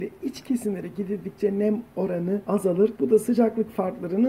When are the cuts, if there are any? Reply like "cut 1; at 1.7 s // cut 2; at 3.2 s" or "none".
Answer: none